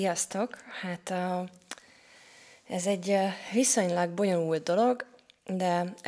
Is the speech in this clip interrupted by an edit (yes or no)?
no